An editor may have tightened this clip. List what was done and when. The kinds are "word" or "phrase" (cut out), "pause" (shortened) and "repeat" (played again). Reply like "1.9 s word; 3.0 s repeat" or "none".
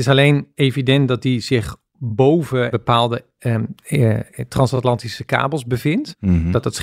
2.7 s phrase